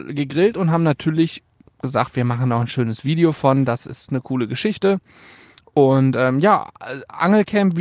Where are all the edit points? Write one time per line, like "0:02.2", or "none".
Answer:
none

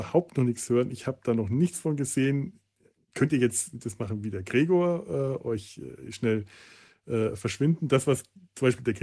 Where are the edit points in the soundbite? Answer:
none

